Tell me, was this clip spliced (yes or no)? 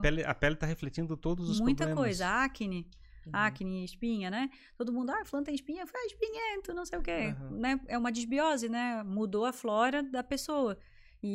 no